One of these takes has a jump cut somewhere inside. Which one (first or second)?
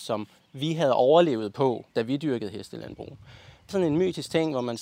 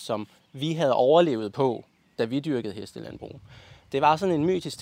first